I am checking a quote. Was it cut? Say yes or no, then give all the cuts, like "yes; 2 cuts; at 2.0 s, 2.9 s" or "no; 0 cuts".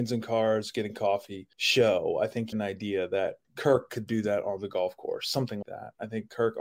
yes; 4 cuts; at 1.5 s, 2.5 s, 3.4 s, 5.6 s